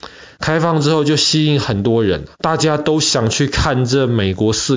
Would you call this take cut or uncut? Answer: cut